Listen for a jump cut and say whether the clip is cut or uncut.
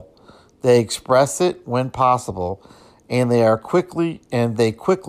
uncut